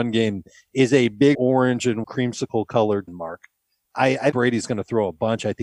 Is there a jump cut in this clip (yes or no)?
yes